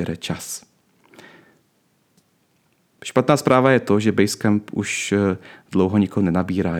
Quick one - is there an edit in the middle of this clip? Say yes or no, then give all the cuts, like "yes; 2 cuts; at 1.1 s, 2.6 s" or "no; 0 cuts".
no; 0 cuts